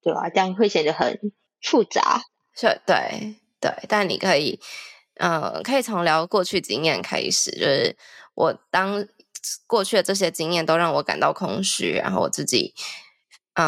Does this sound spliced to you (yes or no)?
yes